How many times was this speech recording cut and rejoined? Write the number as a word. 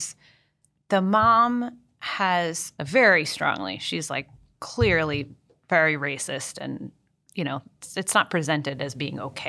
one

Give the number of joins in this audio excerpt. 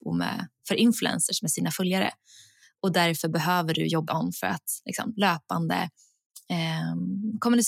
one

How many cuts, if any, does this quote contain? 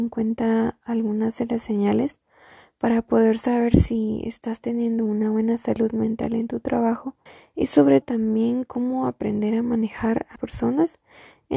three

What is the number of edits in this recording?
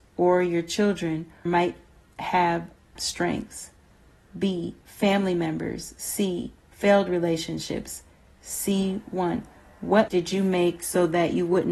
four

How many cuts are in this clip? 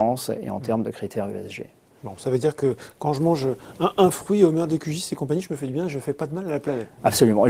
zero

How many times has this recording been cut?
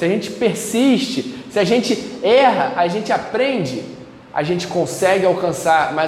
zero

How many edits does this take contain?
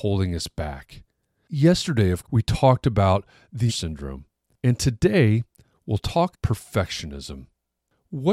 three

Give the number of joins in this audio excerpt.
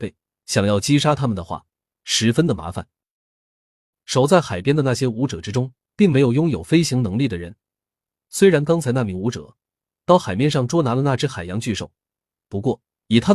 zero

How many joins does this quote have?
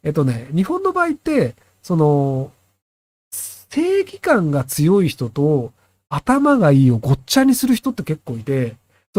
zero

